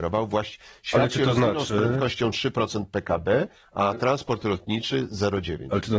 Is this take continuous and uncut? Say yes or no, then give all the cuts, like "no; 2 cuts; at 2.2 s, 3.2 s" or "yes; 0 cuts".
yes; 0 cuts